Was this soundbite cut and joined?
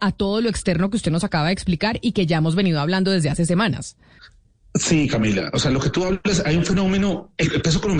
yes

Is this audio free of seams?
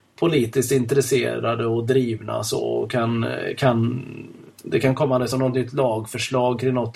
yes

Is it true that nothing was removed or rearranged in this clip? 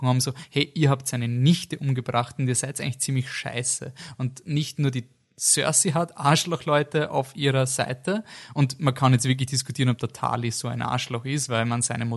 yes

